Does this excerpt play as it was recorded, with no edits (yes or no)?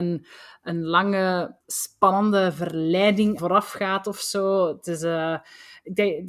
no